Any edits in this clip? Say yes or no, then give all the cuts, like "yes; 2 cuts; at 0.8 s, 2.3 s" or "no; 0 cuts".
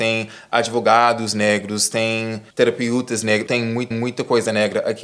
yes; 3 cuts; at 2.5 s, 3.5 s, 3.9 s